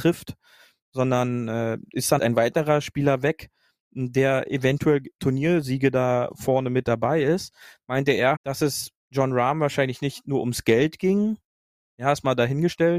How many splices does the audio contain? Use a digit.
3